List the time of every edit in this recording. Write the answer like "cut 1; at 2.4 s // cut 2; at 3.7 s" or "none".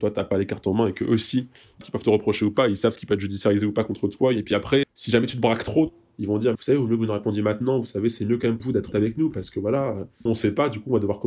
cut 1; at 1.8 s // cut 2; at 4.8 s // cut 3; at 6.5 s // cut 4; at 8.6 s // cut 5; at 8.9 s // cut 6; at 10.3 s